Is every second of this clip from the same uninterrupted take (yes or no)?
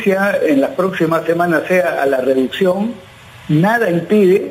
yes